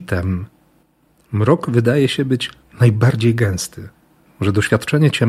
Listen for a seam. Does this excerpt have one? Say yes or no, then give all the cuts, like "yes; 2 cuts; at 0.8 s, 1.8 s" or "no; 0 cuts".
no; 0 cuts